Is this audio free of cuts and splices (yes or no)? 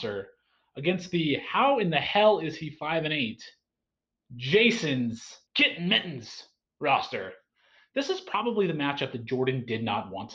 no